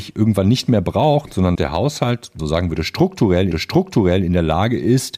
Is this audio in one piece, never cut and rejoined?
no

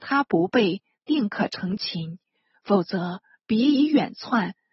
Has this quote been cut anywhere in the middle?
no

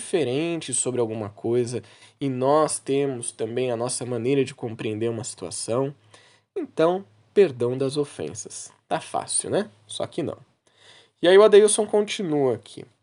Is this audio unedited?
yes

